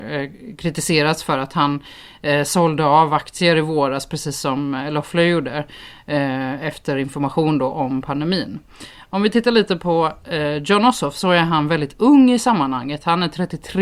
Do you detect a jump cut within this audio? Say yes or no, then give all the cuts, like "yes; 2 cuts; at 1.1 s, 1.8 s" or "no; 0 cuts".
no; 0 cuts